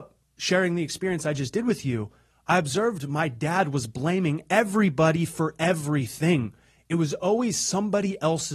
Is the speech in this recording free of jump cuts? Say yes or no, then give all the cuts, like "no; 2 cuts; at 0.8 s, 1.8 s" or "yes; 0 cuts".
yes; 0 cuts